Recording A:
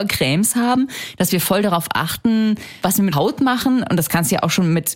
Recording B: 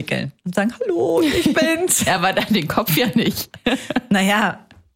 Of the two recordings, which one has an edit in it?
A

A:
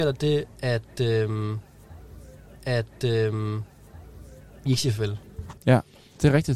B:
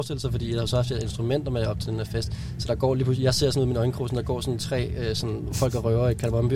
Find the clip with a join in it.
A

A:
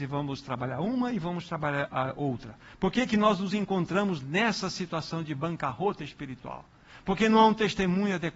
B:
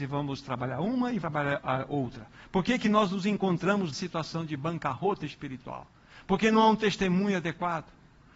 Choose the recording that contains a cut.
B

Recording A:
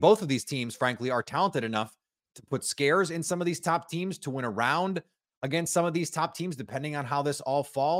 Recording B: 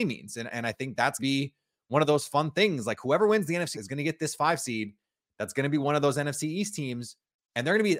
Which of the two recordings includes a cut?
B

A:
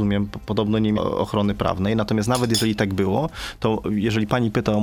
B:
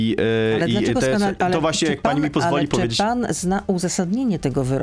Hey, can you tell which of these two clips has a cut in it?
A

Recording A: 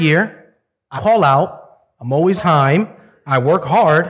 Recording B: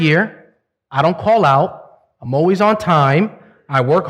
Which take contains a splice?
A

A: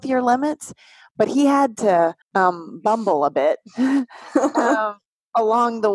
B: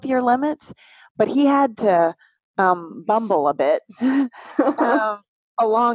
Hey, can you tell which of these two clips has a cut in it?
A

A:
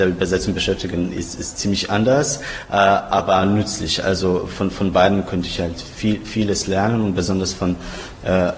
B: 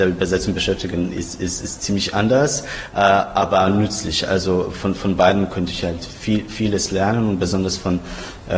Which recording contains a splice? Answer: A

